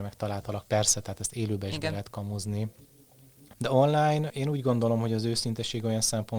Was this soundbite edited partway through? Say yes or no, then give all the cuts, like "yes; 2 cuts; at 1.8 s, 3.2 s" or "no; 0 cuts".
yes; 2 cuts; at 3.5 s, 4.3 s